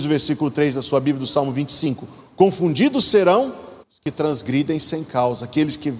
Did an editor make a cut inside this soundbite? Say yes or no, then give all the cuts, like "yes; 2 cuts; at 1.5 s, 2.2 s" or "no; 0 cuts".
yes; 1 cut; at 3.8 s